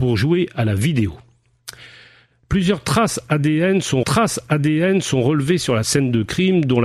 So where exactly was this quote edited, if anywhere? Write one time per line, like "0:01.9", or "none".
0:04.0